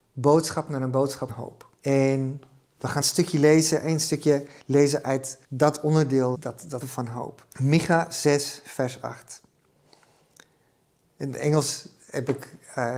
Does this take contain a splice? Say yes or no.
yes